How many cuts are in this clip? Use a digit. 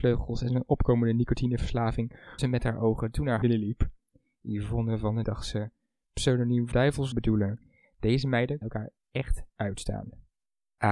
7